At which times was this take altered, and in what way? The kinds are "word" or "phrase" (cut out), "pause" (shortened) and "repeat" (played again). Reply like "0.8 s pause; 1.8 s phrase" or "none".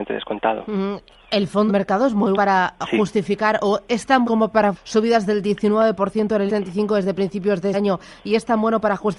1.7 s word; 2.3 s word; 4.2 s word; 4.7 s word; 6.5 s word; 7.7 s word